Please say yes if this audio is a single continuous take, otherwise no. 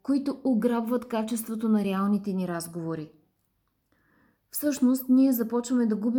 yes